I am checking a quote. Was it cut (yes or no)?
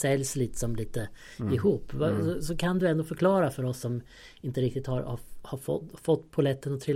no